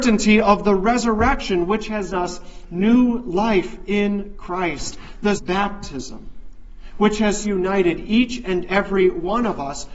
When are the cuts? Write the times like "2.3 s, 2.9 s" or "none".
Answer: 2.1 s, 5.4 s, 7.4 s